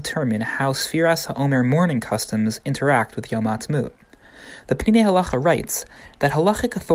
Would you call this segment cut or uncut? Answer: uncut